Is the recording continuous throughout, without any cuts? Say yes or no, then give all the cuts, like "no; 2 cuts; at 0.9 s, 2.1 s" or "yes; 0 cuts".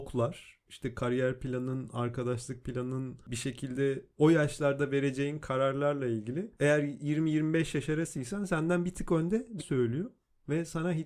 no; 2 cuts; at 4.1 s, 9.6 s